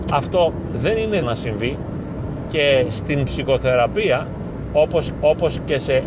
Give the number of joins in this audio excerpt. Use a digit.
2